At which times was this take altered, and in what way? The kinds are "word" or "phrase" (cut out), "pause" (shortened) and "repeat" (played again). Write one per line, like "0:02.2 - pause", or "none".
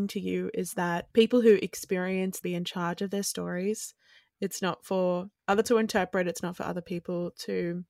0:01.1 - pause
0:02.4 - phrase
0:05.6 - word